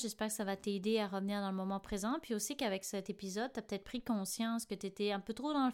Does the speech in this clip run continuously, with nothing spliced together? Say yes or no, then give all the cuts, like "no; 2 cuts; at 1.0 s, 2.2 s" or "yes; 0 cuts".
yes; 0 cuts